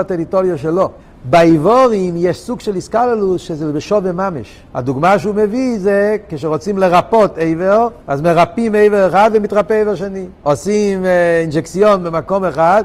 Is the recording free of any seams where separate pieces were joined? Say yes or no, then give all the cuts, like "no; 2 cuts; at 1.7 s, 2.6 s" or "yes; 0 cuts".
no; 4 cuts; at 1.0 s, 4.7 s, 8.0 s, 10.4 s